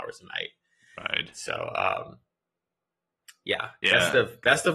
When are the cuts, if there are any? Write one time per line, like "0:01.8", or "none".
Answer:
none